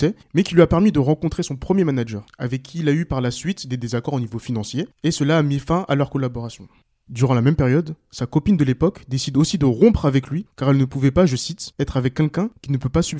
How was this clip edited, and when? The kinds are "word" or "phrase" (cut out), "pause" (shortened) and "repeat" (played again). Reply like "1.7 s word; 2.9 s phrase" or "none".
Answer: none